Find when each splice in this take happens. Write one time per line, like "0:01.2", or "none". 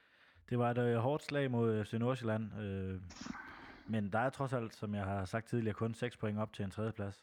none